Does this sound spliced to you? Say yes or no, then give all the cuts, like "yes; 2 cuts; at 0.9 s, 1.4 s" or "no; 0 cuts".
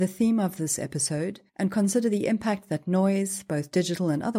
yes; 1 cut; at 1.5 s